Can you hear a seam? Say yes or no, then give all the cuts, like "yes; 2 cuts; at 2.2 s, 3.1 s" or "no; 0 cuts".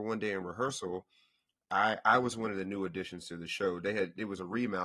no; 0 cuts